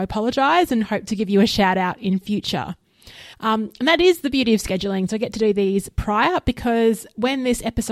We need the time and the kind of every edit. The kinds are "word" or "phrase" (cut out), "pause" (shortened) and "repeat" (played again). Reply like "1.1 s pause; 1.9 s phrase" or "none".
3.3 s pause